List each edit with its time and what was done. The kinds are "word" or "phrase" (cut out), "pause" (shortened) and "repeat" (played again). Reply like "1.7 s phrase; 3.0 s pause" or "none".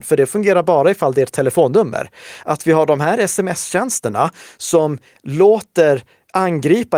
none

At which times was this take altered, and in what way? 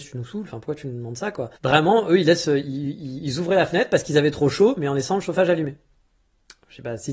1.6 s pause

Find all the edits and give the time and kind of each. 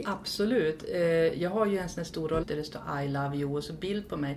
2.4 s word

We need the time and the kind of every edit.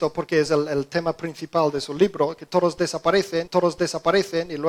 3.5 s repeat

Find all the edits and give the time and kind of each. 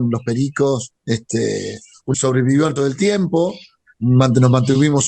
1.0 s pause; 2.1 s phrase; 2.8 s word

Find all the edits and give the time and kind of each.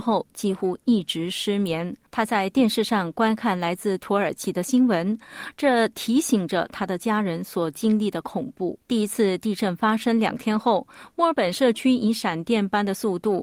8.8 s pause

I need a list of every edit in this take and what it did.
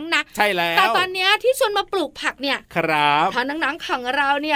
none

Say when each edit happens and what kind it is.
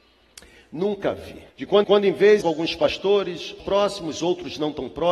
1.5 s pause; 1.8 s repeat; 2.4 s phrase; 3.6 s word

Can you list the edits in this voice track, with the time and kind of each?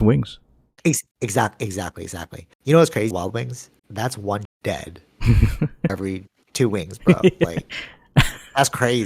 1.1 s pause; 2.5 s pause; 3.1 s word; 3.8 s pause; 4.4 s word; 5.9 s word

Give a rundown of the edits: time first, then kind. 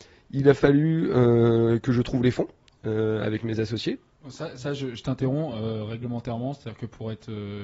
none

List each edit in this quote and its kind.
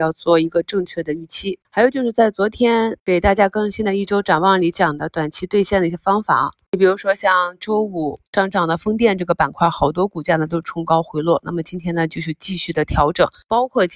1.6 s pause

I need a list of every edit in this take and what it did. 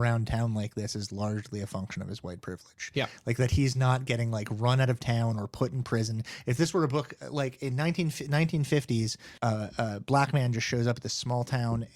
9.4 s pause

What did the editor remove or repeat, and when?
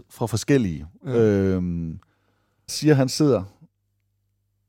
2.7 s word

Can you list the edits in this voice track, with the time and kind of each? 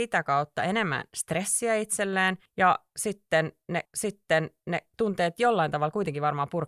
2.5 s pause; 3.9 s repeat

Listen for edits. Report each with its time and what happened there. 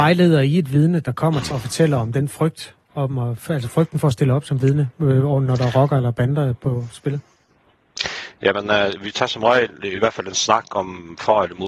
1.5 s word

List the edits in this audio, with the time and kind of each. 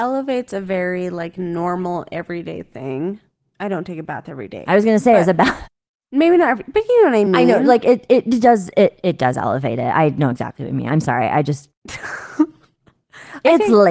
none

